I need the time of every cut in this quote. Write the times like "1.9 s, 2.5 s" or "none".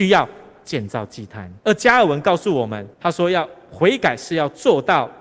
1.6 s, 2.9 s